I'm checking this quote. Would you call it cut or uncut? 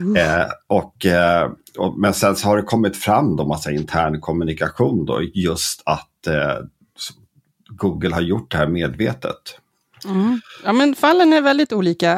uncut